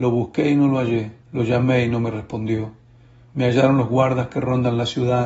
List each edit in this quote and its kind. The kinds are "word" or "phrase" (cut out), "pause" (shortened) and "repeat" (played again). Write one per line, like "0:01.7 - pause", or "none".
0:01.2 - pause